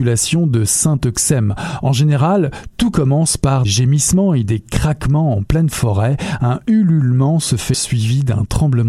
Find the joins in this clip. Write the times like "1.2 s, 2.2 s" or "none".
3.6 s, 7.7 s